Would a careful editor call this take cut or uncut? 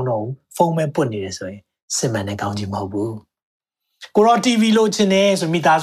uncut